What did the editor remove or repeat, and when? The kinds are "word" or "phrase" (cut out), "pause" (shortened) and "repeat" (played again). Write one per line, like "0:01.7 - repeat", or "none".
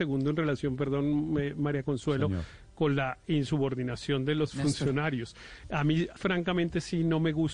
0:06.2 - word